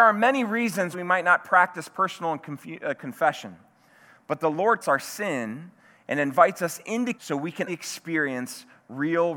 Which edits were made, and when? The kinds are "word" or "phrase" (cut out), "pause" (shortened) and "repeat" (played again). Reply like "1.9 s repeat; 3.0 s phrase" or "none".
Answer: 0.9 s word; 3.0 s word; 4.8 s word; 7.1 s word; 7.7 s word